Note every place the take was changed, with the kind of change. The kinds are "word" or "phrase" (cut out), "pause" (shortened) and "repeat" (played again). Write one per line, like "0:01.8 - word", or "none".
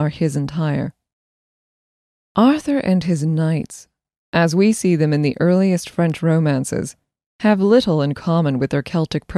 none